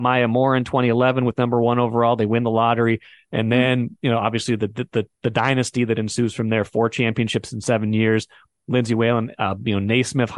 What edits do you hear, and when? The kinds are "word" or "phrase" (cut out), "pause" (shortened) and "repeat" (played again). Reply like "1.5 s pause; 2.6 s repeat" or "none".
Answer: none